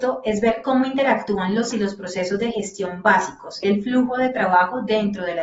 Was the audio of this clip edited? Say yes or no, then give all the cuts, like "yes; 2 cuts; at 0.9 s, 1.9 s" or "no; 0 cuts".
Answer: yes; 2 cuts; at 1.7 s, 3.6 s